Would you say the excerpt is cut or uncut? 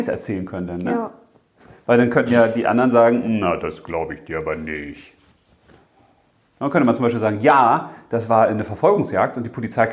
uncut